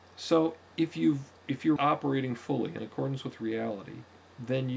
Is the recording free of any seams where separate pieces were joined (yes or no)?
no